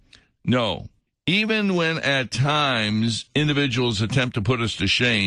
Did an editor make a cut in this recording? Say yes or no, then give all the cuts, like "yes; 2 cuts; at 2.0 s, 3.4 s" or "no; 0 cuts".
yes; 1 cut; at 1.1 s